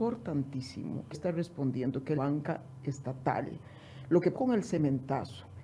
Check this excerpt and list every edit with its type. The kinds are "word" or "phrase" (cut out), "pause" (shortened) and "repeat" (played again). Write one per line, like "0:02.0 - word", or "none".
0:01.1 - word
0:02.1 - word
0:04.3 - word